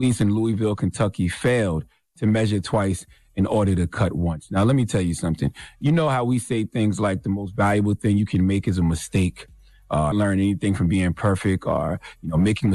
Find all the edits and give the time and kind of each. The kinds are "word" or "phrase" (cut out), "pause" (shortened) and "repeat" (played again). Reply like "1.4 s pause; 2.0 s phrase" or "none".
10.1 s phrase